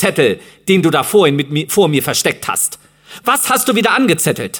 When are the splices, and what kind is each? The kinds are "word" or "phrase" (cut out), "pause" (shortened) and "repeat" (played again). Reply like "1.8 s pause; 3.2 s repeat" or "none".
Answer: none